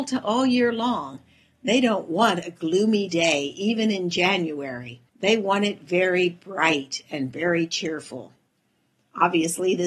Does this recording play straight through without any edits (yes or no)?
no